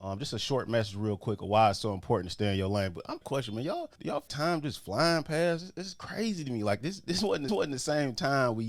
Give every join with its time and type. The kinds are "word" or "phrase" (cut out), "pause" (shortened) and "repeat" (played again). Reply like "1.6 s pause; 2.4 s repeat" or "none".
3.2 s phrase; 3.9 s pause; 4.3 s word; 7.5 s repeat